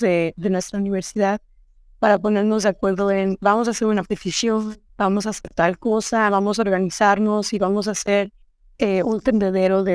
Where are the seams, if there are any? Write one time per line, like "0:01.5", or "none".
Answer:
0:04.9